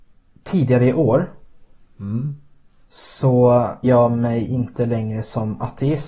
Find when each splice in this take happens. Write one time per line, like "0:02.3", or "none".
0:03.8